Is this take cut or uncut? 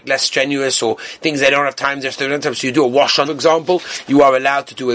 cut